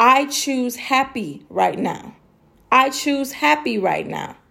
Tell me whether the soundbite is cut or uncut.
uncut